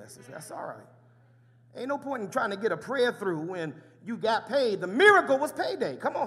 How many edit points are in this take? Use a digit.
0